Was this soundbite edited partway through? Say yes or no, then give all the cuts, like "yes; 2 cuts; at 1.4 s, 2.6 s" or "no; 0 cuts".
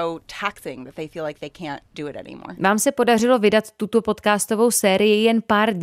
no; 0 cuts